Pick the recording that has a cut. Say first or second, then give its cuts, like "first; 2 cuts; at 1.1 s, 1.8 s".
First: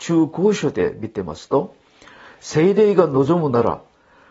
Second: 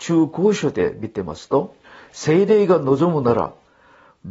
second; 1 cut; at 1.8 s